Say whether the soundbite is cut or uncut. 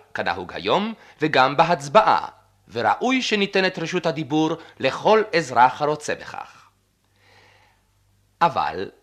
uncut